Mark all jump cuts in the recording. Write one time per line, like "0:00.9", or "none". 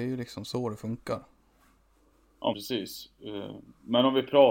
0:02.5